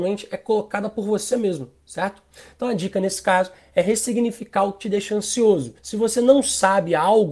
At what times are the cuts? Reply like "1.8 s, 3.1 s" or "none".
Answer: 5.8 s